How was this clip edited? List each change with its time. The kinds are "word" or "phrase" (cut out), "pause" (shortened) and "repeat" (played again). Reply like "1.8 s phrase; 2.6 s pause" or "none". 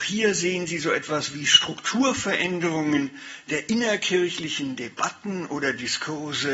none